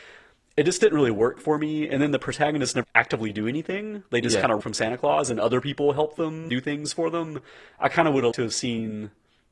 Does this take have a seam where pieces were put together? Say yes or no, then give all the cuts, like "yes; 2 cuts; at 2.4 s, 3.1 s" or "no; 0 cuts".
yes; 4 cuts; at 2.8 s, 4.6 s, 6.5 s, 8.3 s